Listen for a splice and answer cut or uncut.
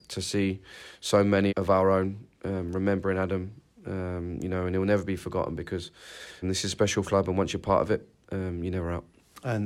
cut